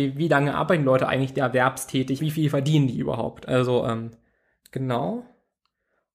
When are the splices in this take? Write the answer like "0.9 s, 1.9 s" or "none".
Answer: 2.2 s